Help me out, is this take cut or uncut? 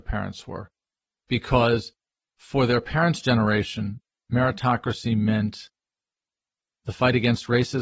uncut